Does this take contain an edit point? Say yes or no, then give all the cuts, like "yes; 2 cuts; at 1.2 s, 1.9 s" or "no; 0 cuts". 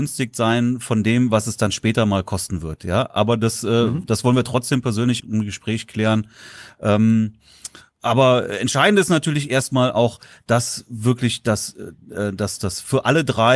yes; 1 cut; at 5.2 s